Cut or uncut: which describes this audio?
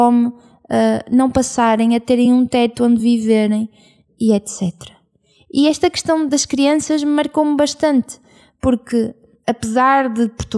uncut